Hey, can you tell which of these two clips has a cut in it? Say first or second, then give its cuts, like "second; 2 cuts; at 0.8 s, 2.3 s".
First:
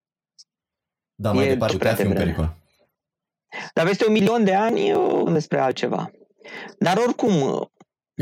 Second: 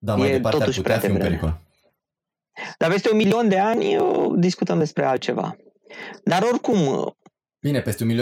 first; 2 cuts; at 1.7 s, 5.3 s